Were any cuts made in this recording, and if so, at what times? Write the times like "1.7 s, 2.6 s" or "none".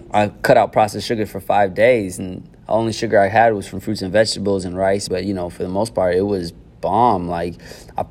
5.1 s